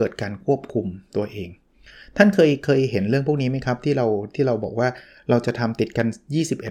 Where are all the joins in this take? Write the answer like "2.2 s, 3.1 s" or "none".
none